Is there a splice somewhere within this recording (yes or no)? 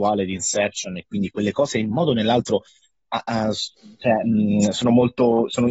no